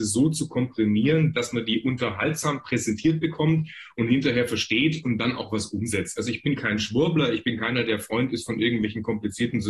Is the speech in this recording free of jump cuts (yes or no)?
yes